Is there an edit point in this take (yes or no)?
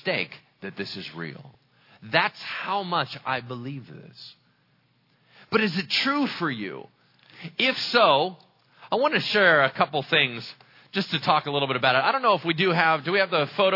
no